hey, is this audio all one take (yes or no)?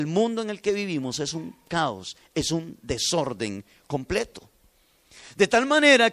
yes